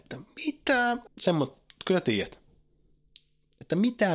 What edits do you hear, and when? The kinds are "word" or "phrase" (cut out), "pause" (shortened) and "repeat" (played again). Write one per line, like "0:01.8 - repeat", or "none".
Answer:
0:01.1 - word